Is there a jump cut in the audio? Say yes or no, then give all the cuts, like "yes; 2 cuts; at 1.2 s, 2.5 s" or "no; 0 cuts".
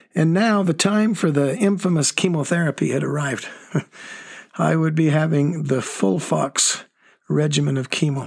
no; 0 cuts